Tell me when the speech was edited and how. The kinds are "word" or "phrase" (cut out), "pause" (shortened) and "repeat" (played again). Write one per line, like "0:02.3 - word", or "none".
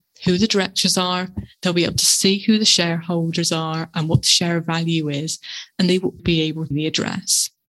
0:06.2 - word
0:06.7 - word